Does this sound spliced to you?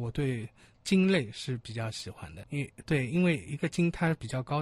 yes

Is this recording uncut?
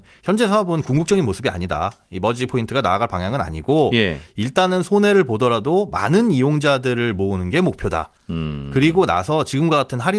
yes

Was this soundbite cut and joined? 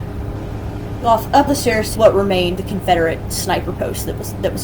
yes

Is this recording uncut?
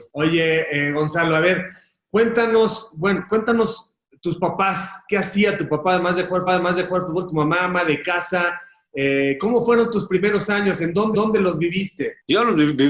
no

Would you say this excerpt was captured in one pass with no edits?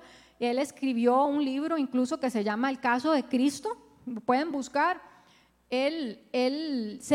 yes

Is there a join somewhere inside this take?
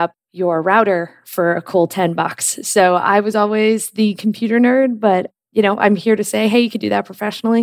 no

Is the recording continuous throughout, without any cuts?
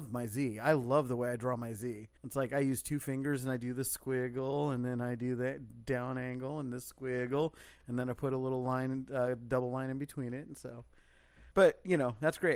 no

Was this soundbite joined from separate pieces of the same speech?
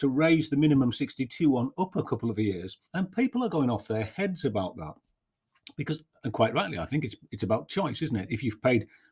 yes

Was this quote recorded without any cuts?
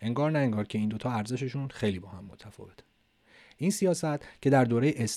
yes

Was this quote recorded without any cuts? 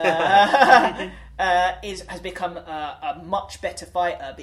yes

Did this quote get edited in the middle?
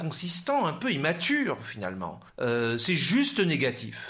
yes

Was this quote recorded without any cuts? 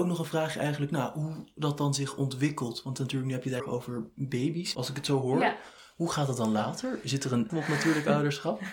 no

